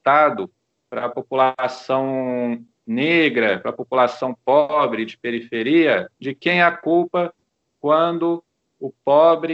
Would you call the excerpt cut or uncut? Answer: cut